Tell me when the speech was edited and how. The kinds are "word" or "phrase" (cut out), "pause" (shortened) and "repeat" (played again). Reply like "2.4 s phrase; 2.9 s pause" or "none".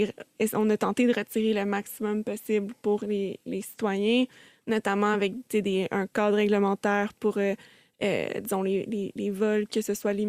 none